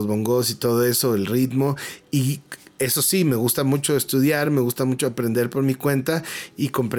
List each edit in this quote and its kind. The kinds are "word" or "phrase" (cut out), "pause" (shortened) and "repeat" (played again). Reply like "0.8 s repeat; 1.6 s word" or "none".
none